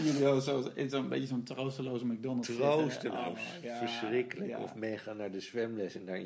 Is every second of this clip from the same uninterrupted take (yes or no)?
yes